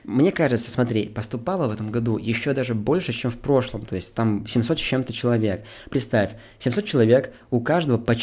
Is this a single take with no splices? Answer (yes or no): yes